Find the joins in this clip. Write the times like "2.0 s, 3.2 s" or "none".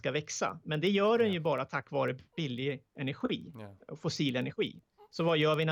none